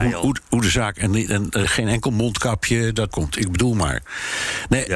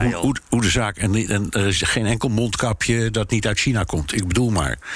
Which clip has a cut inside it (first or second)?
first